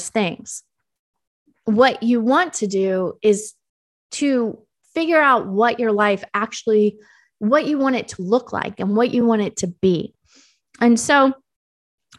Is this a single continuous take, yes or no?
yes